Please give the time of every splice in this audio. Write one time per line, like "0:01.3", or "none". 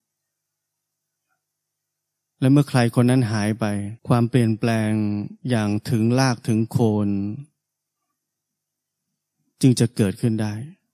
0:04.0